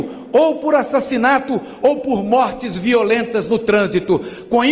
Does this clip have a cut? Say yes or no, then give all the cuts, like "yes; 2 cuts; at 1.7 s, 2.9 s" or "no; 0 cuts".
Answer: no; 0 cuts